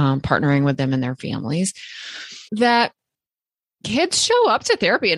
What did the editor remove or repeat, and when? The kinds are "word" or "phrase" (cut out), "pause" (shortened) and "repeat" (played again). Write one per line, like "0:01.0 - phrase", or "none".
0:02.5 - pause